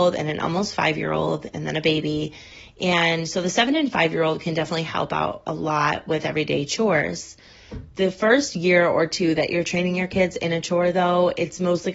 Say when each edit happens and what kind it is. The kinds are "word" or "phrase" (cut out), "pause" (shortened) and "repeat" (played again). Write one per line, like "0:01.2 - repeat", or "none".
none